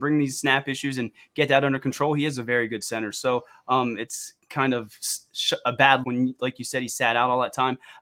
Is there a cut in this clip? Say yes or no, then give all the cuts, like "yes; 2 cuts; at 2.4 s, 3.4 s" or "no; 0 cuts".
yes; 1 cut; at 6.0 s